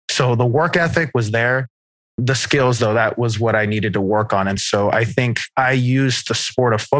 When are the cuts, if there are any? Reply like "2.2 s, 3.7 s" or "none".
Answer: none